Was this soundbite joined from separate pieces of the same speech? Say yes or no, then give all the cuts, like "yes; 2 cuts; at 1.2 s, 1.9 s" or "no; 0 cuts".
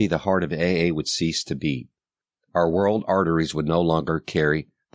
no; 0 cuts